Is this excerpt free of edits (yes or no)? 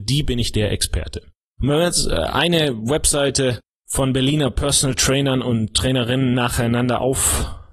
yes